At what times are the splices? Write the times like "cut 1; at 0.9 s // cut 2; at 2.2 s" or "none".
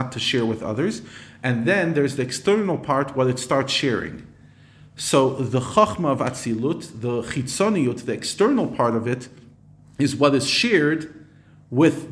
none